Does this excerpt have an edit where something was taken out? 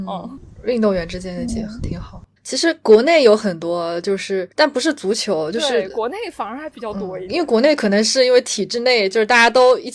yes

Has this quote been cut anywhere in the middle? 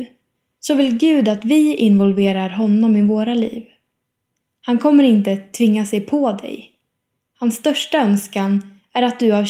no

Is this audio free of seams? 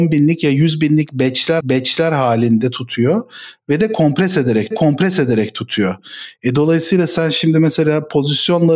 no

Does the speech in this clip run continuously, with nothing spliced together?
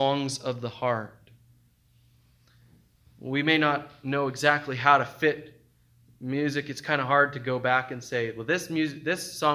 yes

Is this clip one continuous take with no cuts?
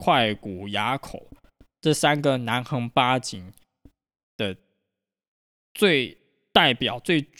yes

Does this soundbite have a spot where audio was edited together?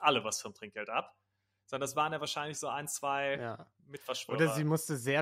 no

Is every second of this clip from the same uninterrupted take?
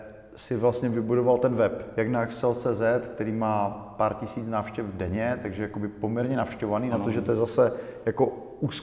yes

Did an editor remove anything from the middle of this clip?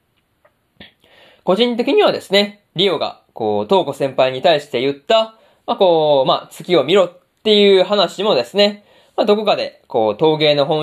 no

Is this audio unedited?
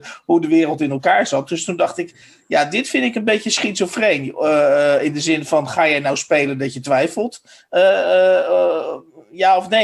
yes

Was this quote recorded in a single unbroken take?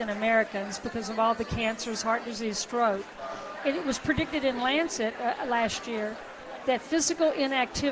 yes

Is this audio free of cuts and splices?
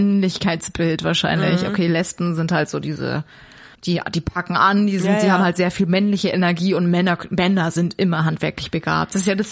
no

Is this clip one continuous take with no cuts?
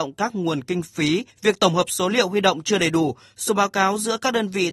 no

